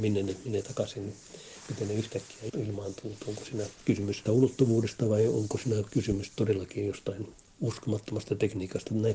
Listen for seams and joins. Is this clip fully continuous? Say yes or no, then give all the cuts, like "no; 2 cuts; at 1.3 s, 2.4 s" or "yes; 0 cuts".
no; 1 cut; at 4.3 s